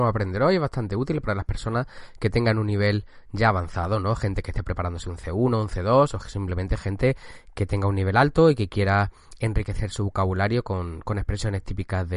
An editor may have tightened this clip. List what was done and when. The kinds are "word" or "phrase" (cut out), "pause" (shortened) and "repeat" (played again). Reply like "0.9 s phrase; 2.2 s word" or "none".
none